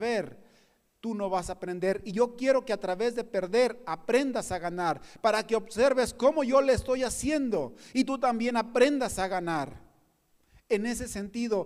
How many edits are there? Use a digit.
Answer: 0